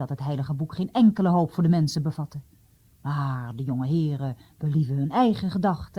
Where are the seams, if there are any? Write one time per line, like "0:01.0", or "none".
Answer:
none